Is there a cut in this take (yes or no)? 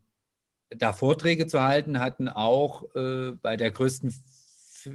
no